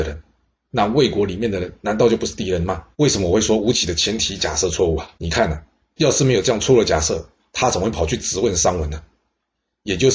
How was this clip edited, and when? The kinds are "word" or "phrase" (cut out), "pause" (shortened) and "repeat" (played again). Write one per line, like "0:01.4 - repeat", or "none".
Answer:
0:02.9 - pause
0:05.2 - pause